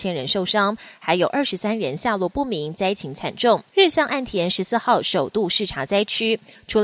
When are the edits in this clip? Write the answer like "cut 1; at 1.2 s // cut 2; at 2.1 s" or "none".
cut 1; at 3.7 s

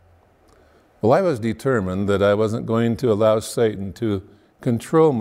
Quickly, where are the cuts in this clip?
none

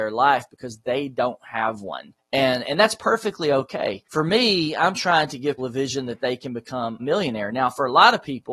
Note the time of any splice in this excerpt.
cut 1; at 2.2 s // cut 2; at 4.0 s // cut 3; at 5.6 s // cut 4; at 7.0 s

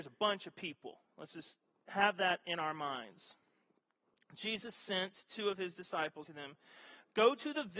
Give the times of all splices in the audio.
cut 1; at 1.1 s // cut 2; at 6.2 s

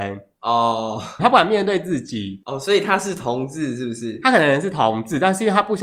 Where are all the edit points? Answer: cut 1; at 1.2 s

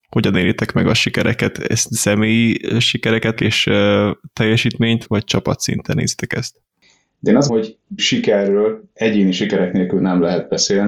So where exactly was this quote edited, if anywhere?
cut 1; at 3.4 s // cut 2; at 5.1 s // cut 3; at 7.5 s // cut 4; at 8.0 s

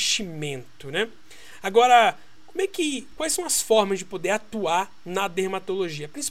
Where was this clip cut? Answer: none

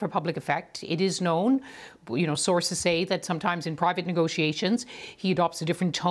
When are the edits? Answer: none

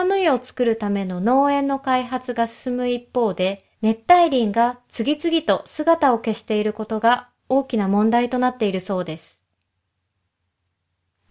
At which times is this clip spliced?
cut 1; at 3.7 s

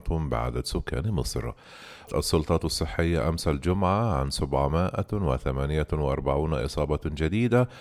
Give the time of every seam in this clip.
cut 1; at 2.1 s

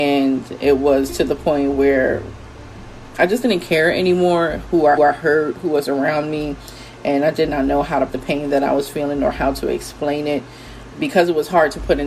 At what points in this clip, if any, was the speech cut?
cut 1; at 5.0 s // cut 2; at 8.1 s // cut 3; at 10.9 s

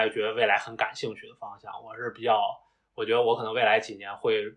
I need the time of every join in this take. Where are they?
none

